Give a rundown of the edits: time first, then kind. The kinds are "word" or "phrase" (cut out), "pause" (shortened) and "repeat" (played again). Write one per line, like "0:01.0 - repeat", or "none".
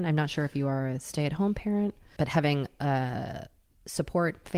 0:02.2 - word

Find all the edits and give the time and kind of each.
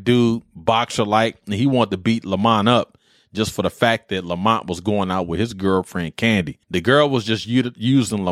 0:06.6 - pause

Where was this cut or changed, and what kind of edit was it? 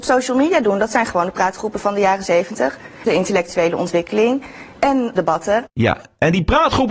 0:03.1 - phrase
0:05.2 - word
0:05.7 - pause

